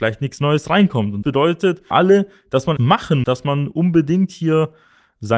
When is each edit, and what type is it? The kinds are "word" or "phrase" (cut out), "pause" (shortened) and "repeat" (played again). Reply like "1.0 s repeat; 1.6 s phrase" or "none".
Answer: 1.2 s word; 1.9 s word; 2.8 s word; 3.2 s word